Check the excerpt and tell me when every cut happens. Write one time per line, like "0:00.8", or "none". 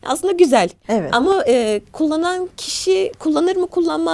none